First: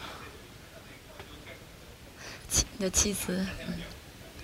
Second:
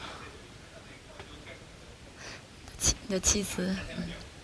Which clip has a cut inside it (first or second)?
first